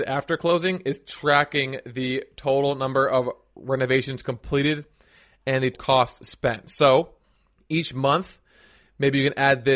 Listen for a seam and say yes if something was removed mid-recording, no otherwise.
yes